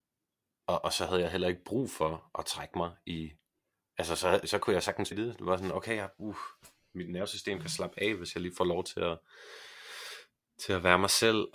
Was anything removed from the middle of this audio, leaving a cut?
yes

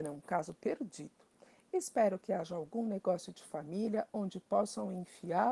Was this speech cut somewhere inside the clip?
no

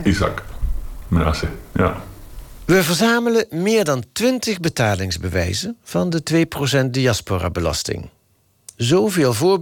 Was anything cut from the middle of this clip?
no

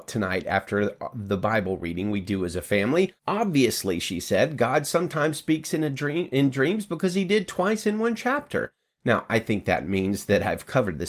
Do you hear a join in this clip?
yes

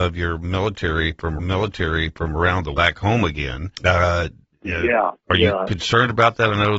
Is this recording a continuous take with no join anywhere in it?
no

